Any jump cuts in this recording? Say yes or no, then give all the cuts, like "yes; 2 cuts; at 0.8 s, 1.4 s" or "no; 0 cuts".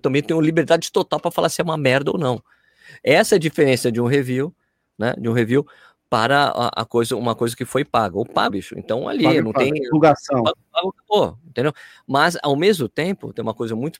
yes; 1 cut; at 8.5 s